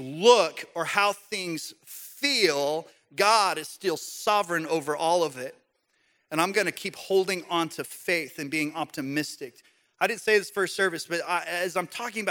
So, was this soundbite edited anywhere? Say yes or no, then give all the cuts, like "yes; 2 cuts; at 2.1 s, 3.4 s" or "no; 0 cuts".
no; 0 cuts